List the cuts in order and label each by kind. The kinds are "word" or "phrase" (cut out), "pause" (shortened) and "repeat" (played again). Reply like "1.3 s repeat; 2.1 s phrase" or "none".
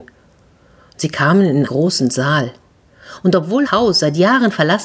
1.7 s word; 3.6 s word